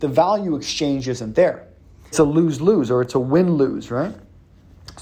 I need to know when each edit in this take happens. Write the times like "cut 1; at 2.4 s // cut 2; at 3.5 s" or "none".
cut 1; at 2.1 s

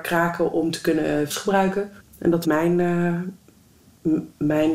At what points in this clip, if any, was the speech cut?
cut 1; at 1.3 s // cut 2; at 2.0 s // cut 3; at 2.4 s

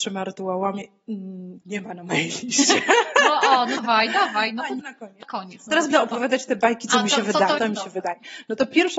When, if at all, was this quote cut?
cut 1; at 1.6 s // cut 2; at 3.8 s // cut 3; at 4.8 s // cut 4; at 5.2 s // cut 5; at 5.9 s // cut 6; at 7.6 s

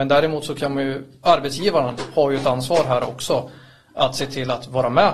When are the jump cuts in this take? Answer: none

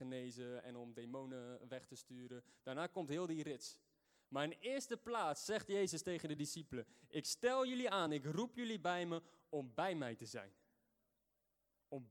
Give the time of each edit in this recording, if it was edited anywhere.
none

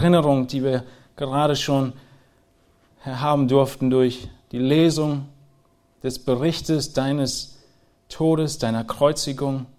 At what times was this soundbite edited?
none

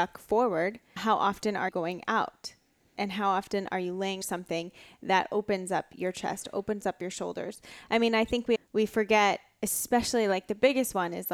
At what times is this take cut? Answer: cut 1; at 1.0 s // cut 2; at 1.7 s // cut 3; at 4.2 s // cut 4; at 8.6 s

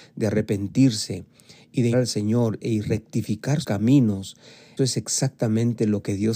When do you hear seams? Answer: cut 1; at 1.9 s // cut 2; at 2.6 s // cut 3; at 3.6 s // cut 4; at 4.8 s

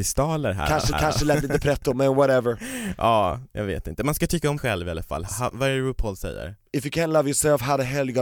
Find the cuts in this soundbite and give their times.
cut 1; at 0.9 s // cut 2; at 4.6 s // cut 3; at 5.3 s // cut 4; at 6.7 s

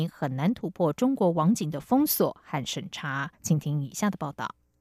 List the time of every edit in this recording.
cut 1; at 3.3 s

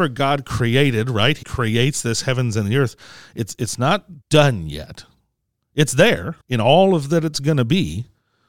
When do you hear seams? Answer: cut 1; at 1.4 s // cut 2; at 4.2 s // cut 3; at 6.4 s

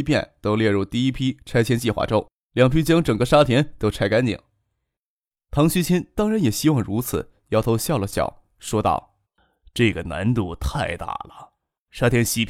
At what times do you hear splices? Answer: cut 1; at 2.3 s // cut 2; at 9.2 s

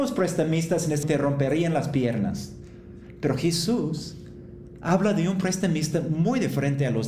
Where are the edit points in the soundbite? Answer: cut 1; at 1.0 s

